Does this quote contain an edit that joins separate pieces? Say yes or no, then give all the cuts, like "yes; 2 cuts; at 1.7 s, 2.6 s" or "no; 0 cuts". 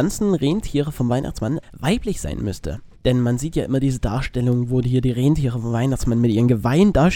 yes; 2 cuts; at 1.6 s, 3.0 s